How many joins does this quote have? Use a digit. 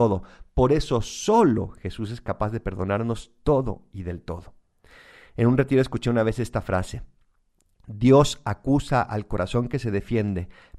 0